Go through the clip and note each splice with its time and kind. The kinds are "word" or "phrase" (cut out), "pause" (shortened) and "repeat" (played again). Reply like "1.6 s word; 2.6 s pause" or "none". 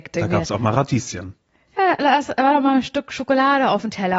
none